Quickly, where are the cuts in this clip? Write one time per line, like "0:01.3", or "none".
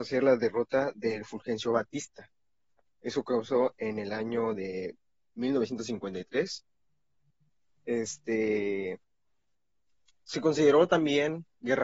none